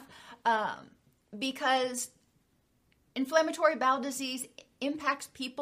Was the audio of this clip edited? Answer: no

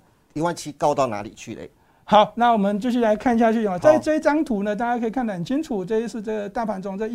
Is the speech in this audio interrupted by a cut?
no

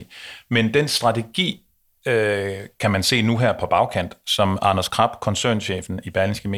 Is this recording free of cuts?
yes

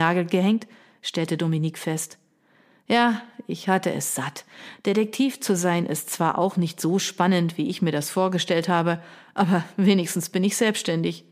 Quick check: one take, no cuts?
yes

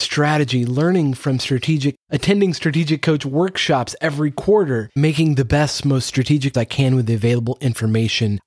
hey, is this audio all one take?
no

